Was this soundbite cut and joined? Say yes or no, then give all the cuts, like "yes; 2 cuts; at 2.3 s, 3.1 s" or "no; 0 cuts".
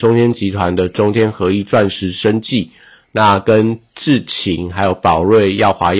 no; 0 cuts